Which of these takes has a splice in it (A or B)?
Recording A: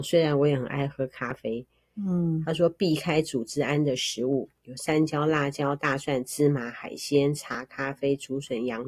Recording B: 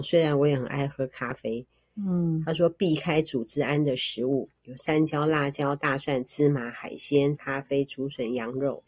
B